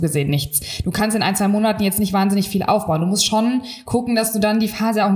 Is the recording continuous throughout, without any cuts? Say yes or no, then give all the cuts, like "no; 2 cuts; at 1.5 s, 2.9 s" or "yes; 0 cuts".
yes; 0 cuts